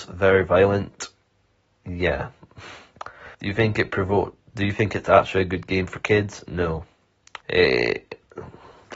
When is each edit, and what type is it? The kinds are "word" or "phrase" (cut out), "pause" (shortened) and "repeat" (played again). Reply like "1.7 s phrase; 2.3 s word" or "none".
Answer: 3.3 s pause; 7.4 s pause